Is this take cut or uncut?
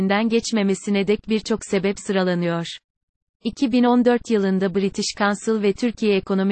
uncut